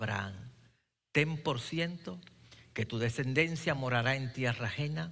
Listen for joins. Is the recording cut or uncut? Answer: uncut